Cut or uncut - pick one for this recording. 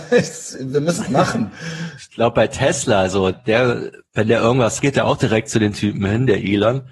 cut